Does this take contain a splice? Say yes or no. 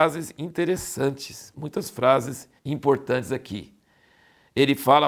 yes